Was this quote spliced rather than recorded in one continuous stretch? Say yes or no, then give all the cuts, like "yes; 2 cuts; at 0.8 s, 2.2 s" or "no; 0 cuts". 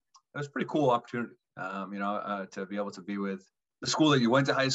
no; 0 cuts